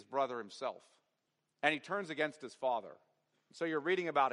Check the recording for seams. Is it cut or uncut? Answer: uncut